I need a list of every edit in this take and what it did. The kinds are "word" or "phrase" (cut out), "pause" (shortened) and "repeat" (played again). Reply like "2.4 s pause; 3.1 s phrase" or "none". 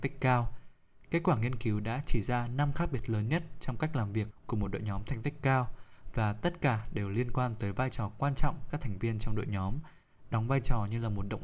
4.3 s phrase; 8.7 s phrase